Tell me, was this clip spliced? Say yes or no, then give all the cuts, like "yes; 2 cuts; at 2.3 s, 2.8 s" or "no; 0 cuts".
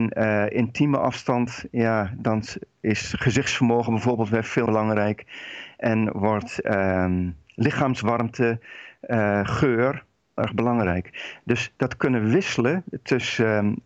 yes; 2 cuts; at 4.7 s, 10.4 s